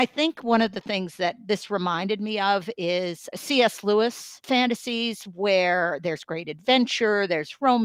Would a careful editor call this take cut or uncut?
cut